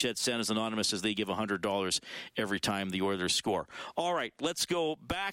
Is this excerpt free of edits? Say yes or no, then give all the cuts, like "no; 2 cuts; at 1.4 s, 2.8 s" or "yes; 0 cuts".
yes; 0 cuts